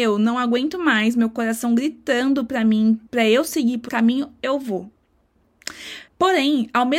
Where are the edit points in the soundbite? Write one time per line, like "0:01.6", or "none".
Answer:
0:03.1
0:03.9
0:06.1